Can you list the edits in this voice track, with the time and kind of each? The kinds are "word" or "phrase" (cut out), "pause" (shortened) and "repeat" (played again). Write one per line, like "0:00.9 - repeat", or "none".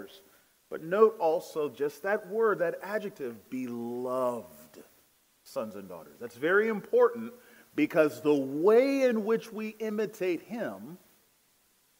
none